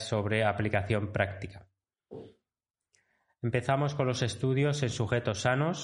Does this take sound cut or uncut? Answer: uncut